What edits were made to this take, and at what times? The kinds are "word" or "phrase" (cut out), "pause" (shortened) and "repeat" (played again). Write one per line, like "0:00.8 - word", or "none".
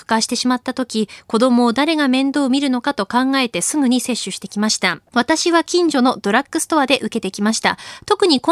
0:05.1 - pause